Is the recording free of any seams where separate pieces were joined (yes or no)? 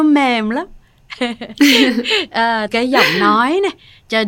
no